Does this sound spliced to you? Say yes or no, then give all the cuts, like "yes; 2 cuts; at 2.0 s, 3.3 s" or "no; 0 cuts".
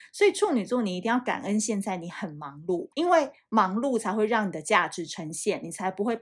yes; 1 cut; at 2.9 s